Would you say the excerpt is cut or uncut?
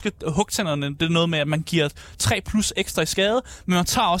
uncut